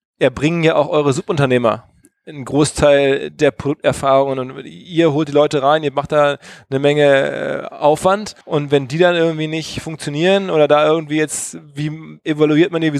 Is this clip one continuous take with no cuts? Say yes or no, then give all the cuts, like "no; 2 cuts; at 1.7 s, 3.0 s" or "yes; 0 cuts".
no; 1 cut; at 8.4 s